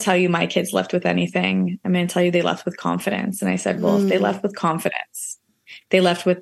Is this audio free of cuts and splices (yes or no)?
yes